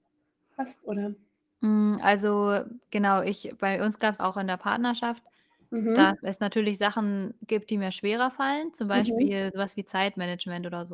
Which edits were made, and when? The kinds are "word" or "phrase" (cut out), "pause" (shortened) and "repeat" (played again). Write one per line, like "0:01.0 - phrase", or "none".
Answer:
0:04.2 - phrase
0:06.2 - word